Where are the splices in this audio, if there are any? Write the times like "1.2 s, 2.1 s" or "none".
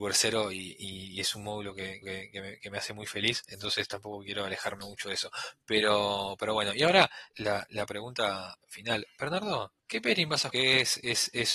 2.0 s, 7.3 s, 9.8 s, 10.5 s